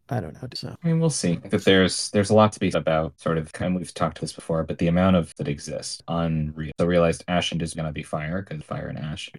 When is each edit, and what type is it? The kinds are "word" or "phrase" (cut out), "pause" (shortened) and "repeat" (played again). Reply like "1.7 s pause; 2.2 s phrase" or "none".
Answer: 1.5 s word; 2.7 s word; 3.6 s word; 4.2 s word; 5.4 s word; 6.8 s word; 7.7 s word

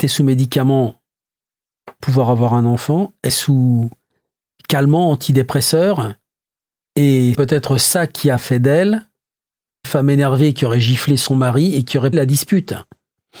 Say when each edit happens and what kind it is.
2.0 s word; 3.3 s word; 7.3 s word; 9.8 s word; 12.1 s word

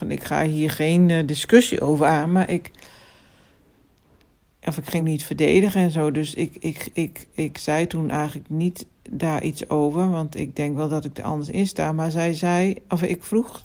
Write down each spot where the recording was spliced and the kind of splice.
5.0 s phrase

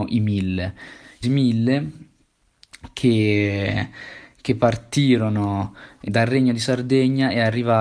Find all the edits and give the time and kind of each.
1.2 s word; 6.1 s word

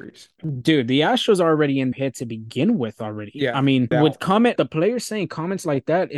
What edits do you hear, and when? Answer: 1.9 s word; 3.9 s phrase; 4.6 s word

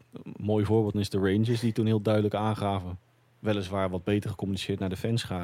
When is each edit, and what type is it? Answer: 0.9 s word

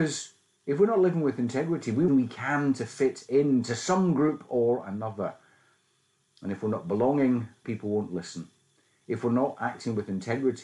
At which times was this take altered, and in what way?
2.1 s phrase; 7.6 s word

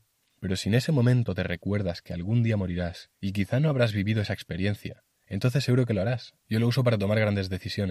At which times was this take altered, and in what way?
3.1 s pause; 6.4 s pause

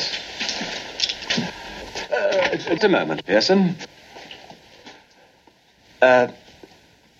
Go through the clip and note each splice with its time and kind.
2.8 s word

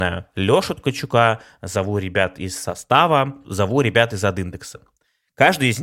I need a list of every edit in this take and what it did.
none

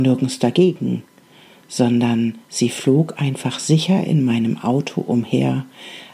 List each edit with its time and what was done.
2.4 s pause

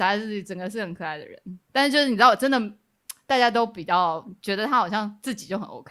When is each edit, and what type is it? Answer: none

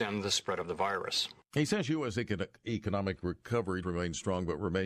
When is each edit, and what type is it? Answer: 3.8 s word

